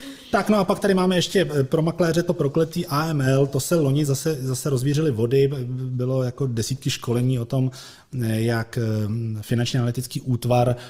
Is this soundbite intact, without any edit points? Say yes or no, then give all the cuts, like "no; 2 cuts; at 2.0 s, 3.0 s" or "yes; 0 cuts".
yes; 0 cuts